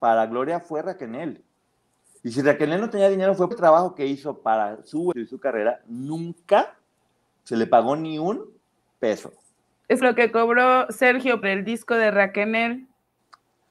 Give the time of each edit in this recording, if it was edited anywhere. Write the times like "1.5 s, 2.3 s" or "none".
3.5 s, 5.1 s, 10.0 s, 11.4 s